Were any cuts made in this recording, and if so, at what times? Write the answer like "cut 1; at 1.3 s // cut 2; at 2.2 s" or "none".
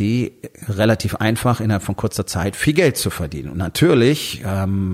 none